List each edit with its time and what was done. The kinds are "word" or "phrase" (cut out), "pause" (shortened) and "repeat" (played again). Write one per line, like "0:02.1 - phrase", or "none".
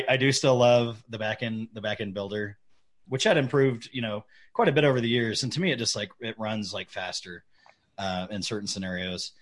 0:03.1 - word